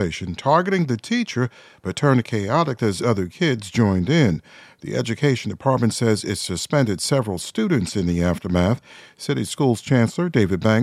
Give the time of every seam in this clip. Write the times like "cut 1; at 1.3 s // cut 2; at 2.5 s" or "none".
none